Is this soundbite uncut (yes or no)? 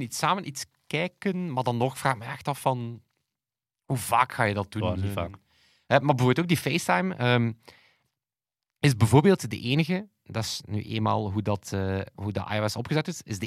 yes